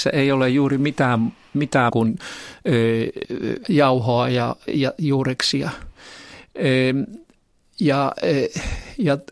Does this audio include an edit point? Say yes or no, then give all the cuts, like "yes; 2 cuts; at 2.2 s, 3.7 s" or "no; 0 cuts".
yes; 4 cuts; at 1.9 s, 3.2 s, 3.6 s, 4.7 s